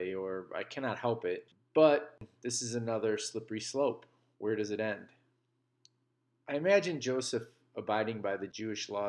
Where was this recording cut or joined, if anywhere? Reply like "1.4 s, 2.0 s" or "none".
none

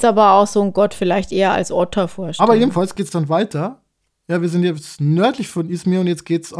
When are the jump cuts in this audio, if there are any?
none

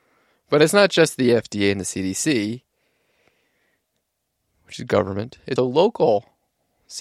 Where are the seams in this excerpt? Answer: 5.6 s

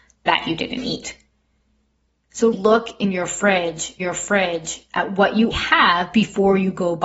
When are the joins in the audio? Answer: 2.5 s, 4.0 s, 5.5 s

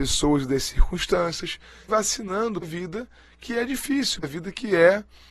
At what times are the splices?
1.9 s, 2.6 s, 4.2 s

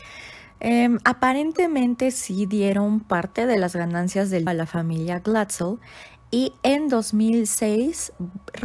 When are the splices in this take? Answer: 4.5 s

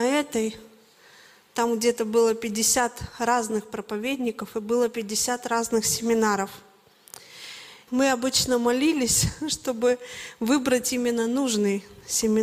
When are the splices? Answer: 7.9 s

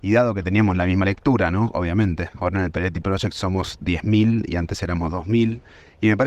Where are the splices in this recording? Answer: none

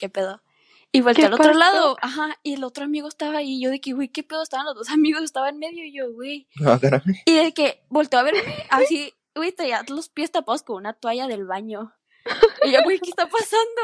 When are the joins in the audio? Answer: 12.8 s

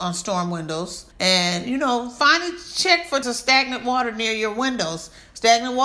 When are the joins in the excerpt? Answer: 1.1 s, 3.2 s

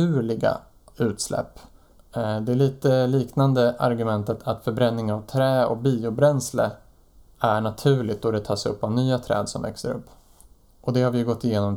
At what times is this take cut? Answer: none

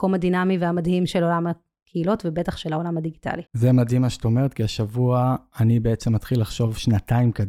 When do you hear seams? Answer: 3.5 s

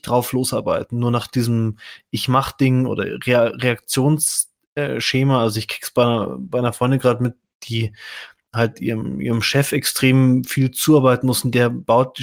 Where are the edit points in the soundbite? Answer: none

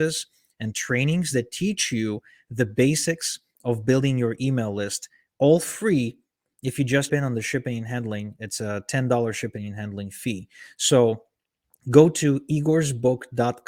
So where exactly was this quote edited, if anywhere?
7.1 s

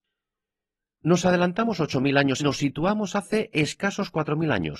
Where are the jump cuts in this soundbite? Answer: 2.4 s

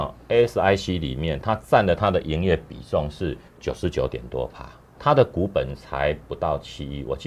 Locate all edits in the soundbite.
3.5 s, 4.9 s

